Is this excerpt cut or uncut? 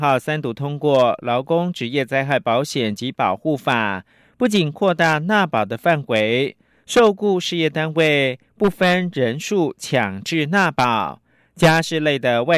uncut